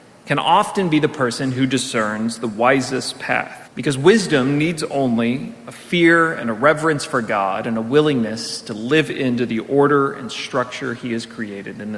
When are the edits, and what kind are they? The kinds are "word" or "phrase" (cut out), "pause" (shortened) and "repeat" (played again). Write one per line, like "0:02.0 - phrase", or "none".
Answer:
0:03.7 - pause